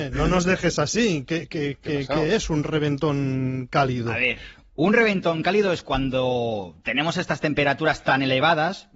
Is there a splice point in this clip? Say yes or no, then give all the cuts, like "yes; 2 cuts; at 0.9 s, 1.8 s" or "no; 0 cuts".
no; 0 cuts